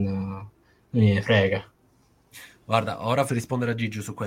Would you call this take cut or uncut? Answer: cut